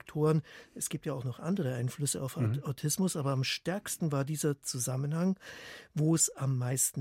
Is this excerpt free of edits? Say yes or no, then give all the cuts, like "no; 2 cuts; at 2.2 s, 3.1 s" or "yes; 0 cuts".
yes; 0 cuts